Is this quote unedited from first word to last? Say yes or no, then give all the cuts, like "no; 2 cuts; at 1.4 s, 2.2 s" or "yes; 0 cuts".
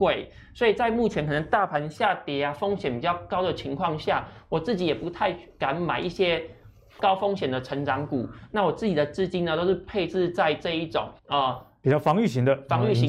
no; 2 cuts; at 7.0 s, 11.2 s